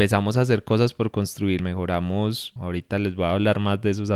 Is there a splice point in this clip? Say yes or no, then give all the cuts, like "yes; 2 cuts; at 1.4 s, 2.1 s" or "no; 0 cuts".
yes; 2 cuts; at 1.6 s, 2.6 s